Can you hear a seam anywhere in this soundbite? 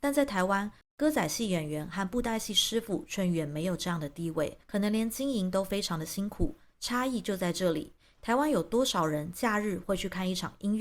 no; 0 cuts

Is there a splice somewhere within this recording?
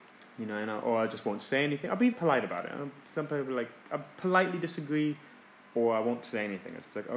yes; 1 cut; at 2.1 s

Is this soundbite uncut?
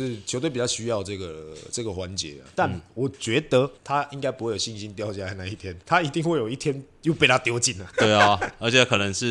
no; 2 cuts; at 3.8 s, 5.8 s

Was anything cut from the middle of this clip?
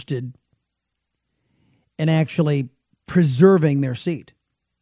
yes; 1 cut; at 2.9 s

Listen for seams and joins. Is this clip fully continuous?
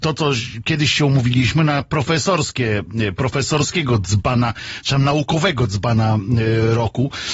yes; 0 cuts

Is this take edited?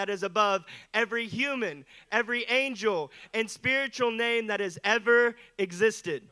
no; 0 cuts

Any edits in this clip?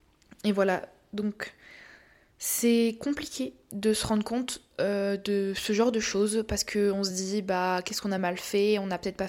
no; 0 cuts

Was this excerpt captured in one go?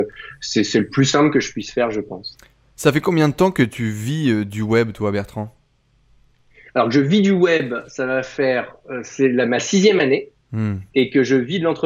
yes; 0 cuts

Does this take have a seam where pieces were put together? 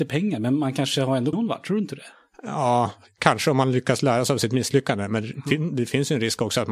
yes; 1 cut; at 1.3 s

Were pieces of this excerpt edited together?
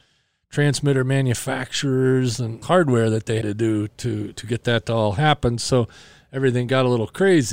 yes; 2 cuts; at 2.6 s, 3.4 s

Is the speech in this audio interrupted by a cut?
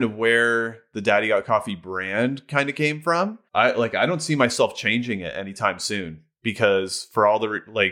yes; 1 cut; at 3.5 s

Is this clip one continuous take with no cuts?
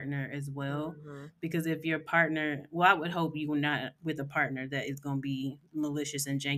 yes; 0 cuts

